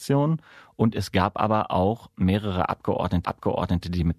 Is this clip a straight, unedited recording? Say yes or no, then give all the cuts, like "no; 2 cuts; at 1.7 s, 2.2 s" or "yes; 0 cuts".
no; 1 cut; at 3.2 s